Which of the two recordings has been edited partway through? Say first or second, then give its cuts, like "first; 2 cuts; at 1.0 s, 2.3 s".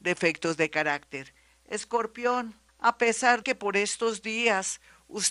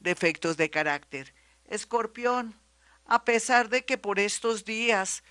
first; 2 cuts; at 2.7 s, 3.4 s